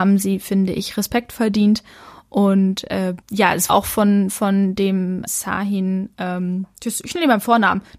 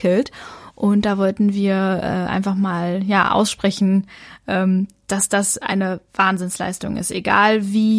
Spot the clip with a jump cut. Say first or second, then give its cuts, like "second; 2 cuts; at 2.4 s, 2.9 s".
first; 3 cuts; at 3.2 s, 3.7 s, 5.3 s